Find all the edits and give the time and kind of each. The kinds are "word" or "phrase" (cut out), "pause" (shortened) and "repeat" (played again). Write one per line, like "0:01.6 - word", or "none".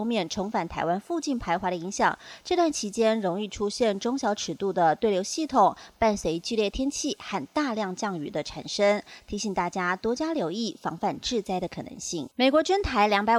0:12.3 - pause